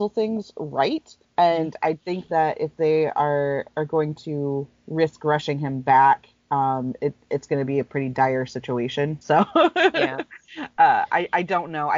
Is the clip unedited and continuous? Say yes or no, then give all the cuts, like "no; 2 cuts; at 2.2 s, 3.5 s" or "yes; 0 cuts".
no; 2 cuts; at 1.2 s, 9.2 s